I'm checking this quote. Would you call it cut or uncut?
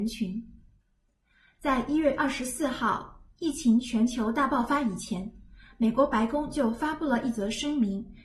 uncut